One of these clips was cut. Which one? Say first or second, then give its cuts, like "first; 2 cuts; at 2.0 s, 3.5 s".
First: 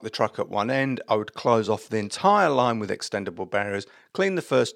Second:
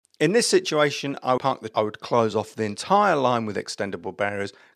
second; 2 cuts; at 1.4 s, 1.7 s